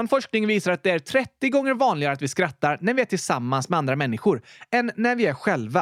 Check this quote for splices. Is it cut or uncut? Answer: uncut